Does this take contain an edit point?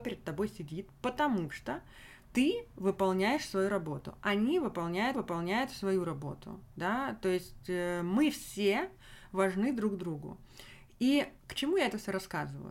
yes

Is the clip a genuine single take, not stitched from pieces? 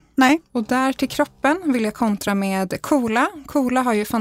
yes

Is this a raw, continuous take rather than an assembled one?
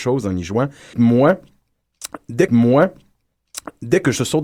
no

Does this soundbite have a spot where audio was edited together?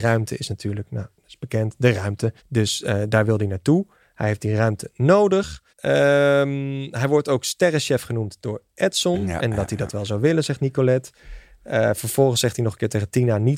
yes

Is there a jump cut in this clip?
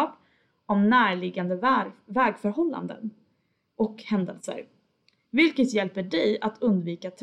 no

